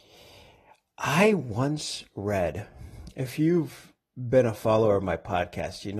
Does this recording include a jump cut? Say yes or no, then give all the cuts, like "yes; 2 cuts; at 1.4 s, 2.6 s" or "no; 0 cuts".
no; 0 cuts